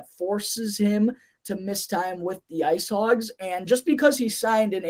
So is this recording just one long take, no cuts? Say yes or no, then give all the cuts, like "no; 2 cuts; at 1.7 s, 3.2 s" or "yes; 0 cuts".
yes; 0 cuts